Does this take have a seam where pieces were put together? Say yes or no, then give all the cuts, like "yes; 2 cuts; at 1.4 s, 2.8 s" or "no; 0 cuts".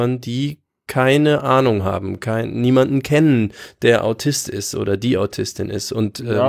no; 0 cuts